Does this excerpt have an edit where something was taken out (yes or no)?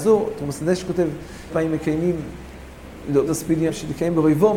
yes